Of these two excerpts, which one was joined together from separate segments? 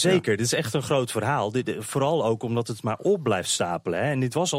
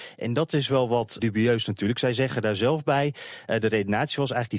second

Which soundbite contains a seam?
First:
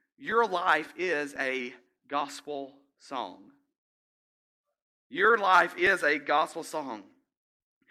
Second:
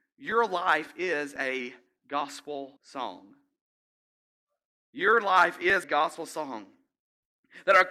second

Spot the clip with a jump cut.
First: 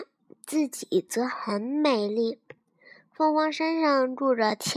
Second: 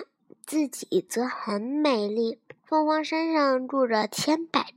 second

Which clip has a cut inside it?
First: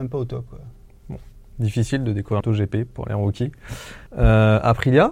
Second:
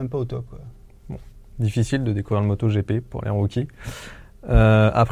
first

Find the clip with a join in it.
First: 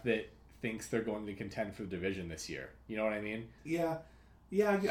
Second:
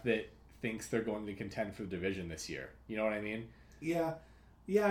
first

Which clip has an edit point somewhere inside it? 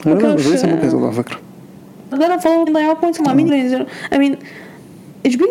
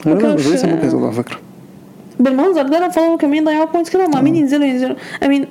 first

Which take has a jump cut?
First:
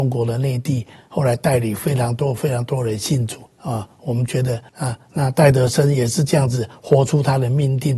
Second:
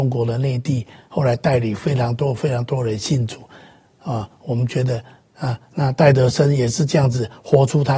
first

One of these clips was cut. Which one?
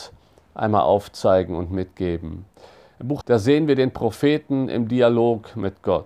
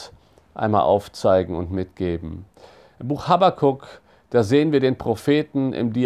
first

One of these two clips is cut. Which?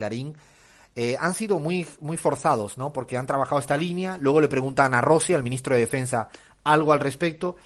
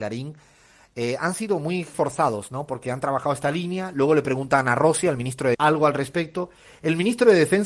second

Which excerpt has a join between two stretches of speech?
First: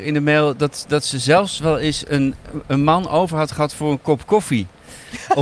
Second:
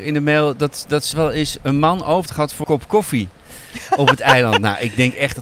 second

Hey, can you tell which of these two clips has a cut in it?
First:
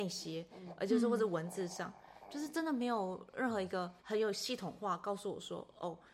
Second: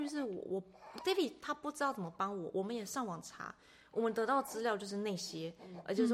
first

